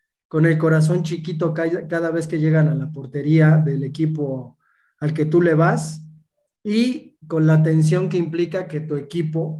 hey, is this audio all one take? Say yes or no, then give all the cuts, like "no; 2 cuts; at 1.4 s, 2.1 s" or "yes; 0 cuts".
yes; 0 cuts